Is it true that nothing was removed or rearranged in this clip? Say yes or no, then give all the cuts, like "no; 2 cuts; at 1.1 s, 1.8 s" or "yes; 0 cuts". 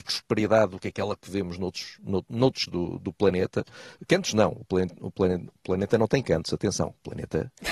no; 1 cut; at 2.7 s